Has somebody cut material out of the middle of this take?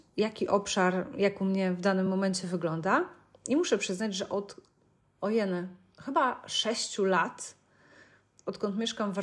no; 0 cuts

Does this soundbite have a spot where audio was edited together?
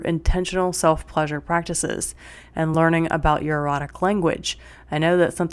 no; 0 cuts

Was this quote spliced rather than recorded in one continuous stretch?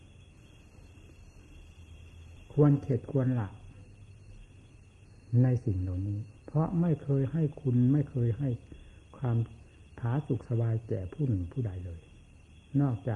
yes; 2 cuts; at 6.4 s, 9.9 s

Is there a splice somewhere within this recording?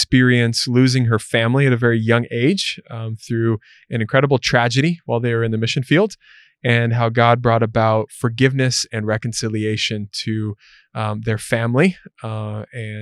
no; 0 cuts

